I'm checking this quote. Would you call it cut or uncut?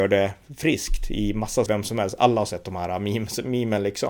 cut